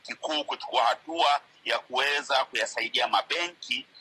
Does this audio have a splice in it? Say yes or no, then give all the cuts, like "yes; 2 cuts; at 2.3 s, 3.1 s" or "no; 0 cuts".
no; 0 cuts